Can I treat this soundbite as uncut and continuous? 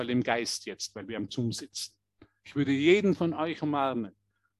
yes; 0 cuts

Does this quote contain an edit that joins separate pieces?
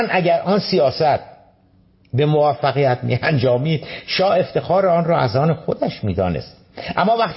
no; 0 cuts

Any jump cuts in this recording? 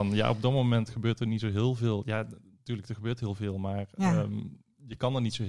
no; 0 cuts

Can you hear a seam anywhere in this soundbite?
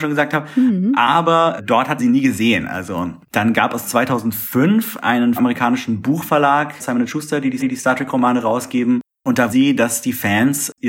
yes; 8 cuts; at 1.6 s, 2.0 s, 3.2 s, 5.4 s, 6.8 s, 7.6 s, 9.1 s, 9.5 s

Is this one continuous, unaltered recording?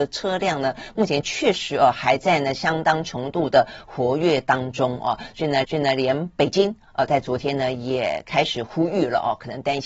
no; 1 cut; at 5.6 s

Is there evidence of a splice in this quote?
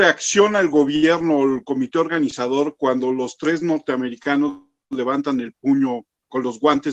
no; 0 cuts

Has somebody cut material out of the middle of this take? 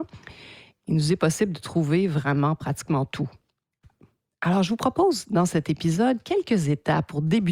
no; 0 cuts

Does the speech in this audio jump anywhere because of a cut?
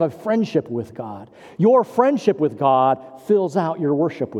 no; 0 cuts

